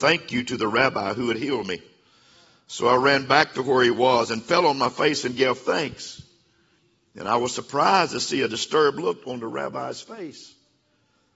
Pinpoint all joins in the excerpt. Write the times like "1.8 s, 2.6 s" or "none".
none